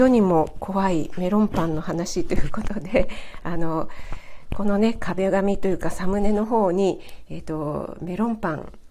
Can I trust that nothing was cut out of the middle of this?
yes; 0 cuts

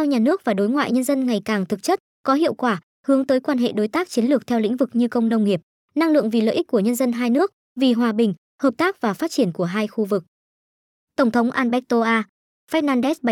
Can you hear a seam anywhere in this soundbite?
no; 0 cuts

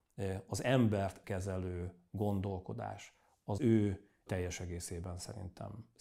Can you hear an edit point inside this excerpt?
yes; 3 cuts; at 1.2 s, 3.6 s, 4.3 s

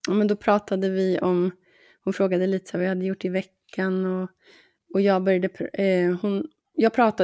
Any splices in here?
no; 0 cuts

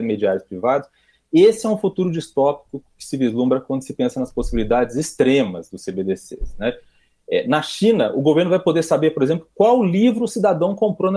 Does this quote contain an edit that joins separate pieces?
no; 0 cuts

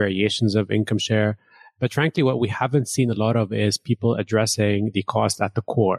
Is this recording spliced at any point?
no; 0 cuts

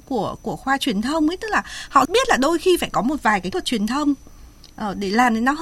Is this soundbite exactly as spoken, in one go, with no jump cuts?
no; 2 cuts; at 2.0 s, 3.5 s

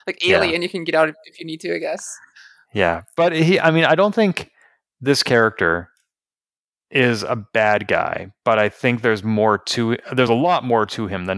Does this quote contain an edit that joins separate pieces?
no; 0 cuts

